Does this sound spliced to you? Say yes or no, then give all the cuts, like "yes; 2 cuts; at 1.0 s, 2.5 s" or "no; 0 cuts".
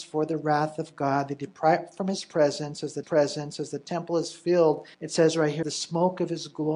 yes; 3 cuts; at 3.0 s, 4.9 s, 5.6 s